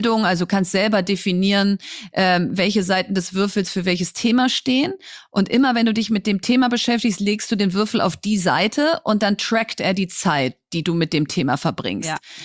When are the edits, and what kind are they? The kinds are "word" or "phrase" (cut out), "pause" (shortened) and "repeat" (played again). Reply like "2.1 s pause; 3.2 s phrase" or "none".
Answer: none